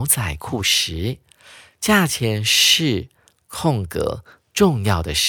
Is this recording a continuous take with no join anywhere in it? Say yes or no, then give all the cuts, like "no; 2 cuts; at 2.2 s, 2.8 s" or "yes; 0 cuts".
yes; 0 cuts